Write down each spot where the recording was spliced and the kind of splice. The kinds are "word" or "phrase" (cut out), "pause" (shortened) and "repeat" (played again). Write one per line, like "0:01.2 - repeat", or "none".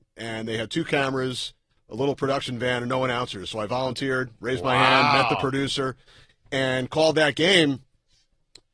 none